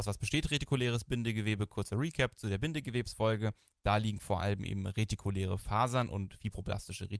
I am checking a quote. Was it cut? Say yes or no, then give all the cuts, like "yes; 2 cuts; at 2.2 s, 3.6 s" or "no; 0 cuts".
no; 0 cuts